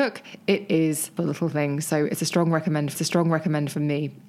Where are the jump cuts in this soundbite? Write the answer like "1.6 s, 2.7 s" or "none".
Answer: 1.2 s, 2.9 s